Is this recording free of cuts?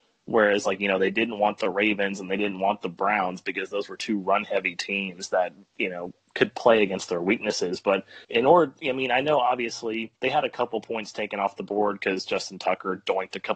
no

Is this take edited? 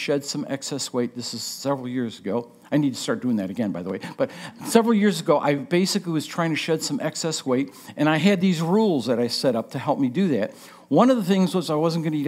no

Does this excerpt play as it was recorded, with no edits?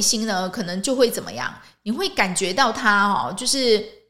yes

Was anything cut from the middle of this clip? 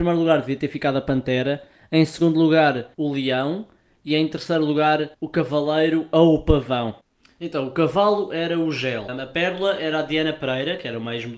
yes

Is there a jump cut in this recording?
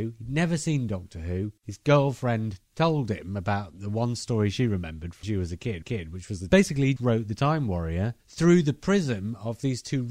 yes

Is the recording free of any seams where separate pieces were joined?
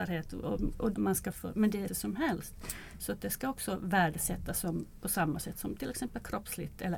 no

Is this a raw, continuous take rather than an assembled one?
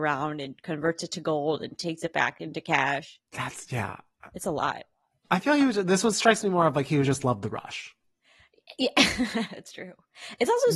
no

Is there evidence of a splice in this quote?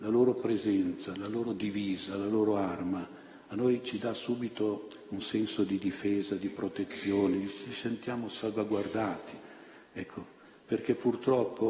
no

